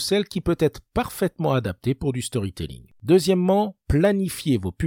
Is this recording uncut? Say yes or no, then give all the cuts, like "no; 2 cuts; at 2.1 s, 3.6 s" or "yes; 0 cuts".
yes; 0 cuts